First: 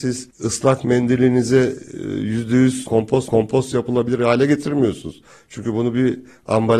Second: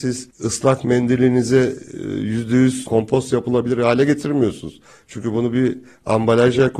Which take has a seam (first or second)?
first